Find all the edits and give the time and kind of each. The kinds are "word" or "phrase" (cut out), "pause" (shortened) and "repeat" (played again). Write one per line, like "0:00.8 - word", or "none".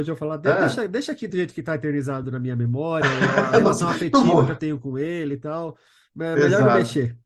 none